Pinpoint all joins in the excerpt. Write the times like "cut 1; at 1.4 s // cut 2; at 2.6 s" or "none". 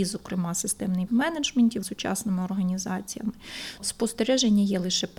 cut 1; at 1.1 s // cut 2; at 1.8 s // cut 3; at 3.8 s